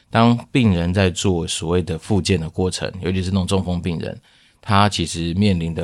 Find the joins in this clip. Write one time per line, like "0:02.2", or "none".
none